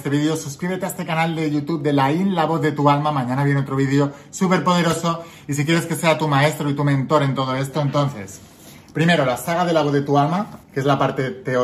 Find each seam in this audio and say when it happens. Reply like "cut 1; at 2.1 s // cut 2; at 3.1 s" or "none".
cut 1; at 10.6 s